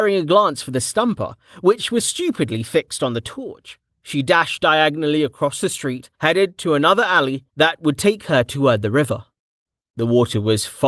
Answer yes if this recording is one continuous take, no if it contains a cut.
no